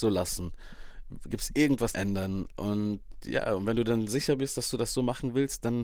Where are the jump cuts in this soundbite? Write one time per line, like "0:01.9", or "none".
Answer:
0:01.9